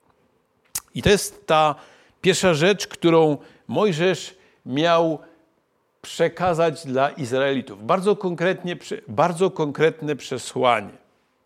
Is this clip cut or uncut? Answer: uncut